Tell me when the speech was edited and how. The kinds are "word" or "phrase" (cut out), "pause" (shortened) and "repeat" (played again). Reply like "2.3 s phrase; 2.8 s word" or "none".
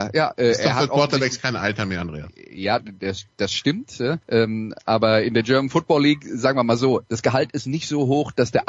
4.2 s pause